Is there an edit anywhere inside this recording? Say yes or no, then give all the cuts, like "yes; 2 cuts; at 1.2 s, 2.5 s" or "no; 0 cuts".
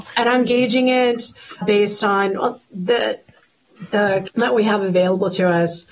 yes; 3 cuts; at 1.6 s, 2.6 s, 4.3 s